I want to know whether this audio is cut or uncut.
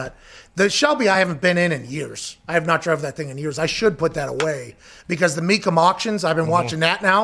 uncut